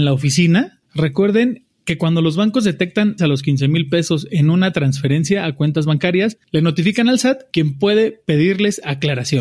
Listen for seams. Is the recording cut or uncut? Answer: cut